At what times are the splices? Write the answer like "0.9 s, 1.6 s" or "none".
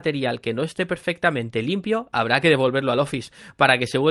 none